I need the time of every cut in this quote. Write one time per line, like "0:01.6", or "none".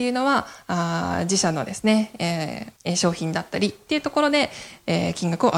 0:02.8